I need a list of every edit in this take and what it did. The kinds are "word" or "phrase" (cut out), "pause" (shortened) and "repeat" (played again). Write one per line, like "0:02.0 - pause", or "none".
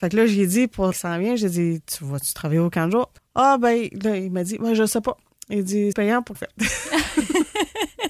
0:00.9 - word
0:03.2 - pause
0:05.9 - phrase
0:06.3 - phrase